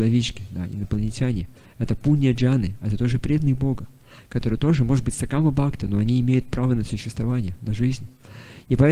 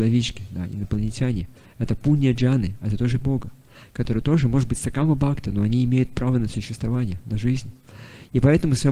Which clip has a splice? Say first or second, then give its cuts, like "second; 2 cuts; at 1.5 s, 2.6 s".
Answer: second; 1 cut; at 3.2 s